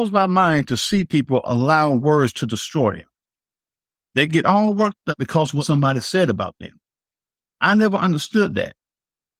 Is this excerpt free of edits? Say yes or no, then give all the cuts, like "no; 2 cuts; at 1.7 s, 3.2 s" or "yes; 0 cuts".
yes; 0 cuts